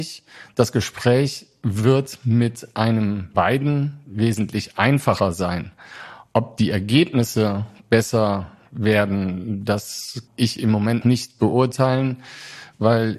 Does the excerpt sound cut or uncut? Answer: cut